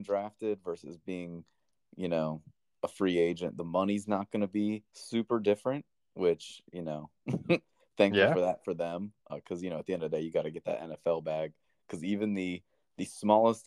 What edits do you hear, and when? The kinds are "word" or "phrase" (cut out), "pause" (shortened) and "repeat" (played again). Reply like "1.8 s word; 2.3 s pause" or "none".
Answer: 4.9 s pause; 9.3 s word